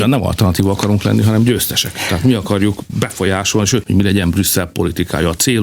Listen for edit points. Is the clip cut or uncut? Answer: cut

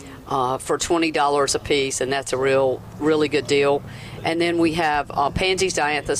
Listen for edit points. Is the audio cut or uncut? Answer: uncut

